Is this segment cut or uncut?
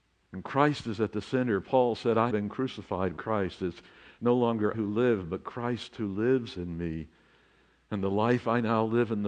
cut